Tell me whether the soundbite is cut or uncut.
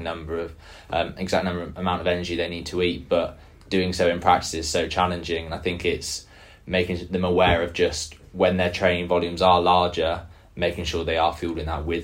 uncut